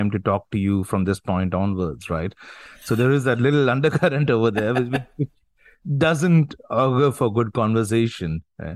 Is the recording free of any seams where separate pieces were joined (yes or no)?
yes